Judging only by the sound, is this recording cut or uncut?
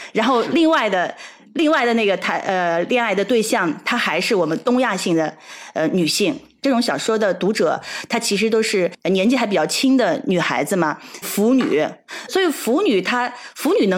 cut